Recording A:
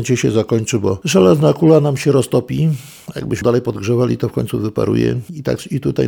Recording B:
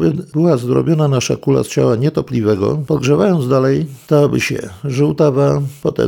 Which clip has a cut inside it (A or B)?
A